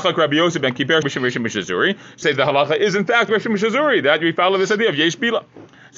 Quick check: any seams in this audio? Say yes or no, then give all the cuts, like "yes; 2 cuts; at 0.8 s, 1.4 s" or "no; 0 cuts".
yes; 3 cuts; at 1.0 s, 2.2 s, 3.3 s